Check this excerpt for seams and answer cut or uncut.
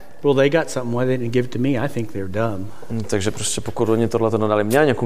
uncut